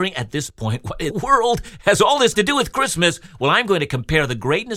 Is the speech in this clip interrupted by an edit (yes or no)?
yes